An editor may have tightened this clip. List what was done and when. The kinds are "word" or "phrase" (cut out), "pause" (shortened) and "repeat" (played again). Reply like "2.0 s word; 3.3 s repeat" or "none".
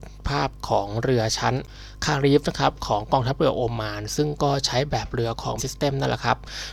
5.6 s word

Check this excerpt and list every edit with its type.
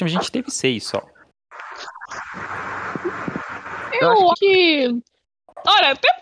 4.3 s word

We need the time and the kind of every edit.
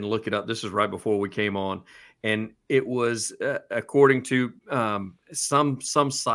4.6 s pause

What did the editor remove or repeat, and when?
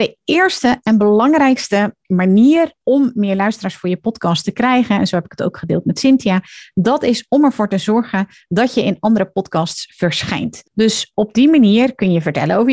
2.0 s pause; 10.7 s pause

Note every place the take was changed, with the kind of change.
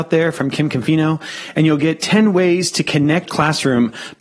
3.3 s word

